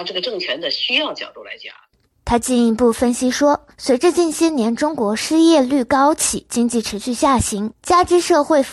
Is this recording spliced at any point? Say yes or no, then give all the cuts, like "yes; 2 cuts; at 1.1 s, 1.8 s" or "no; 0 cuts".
no; 0 cuts